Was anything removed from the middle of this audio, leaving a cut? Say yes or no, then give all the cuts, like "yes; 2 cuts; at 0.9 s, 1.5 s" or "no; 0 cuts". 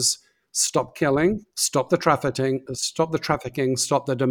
yes; 1 cut; at 1.5 s